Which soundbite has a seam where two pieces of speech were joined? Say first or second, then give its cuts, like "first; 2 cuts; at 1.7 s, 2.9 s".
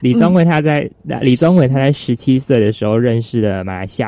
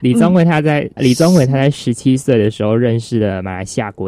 second; 1 cut; at 1.0 s